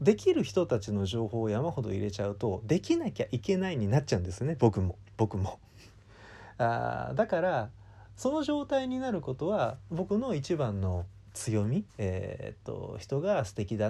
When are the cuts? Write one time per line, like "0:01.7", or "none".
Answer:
0:11.9